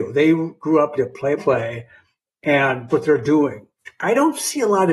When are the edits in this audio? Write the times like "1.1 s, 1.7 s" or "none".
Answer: 1.0 s, 1.4 s, 2.9 s